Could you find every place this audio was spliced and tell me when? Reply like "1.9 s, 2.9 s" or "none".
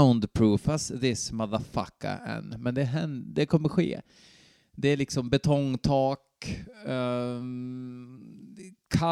none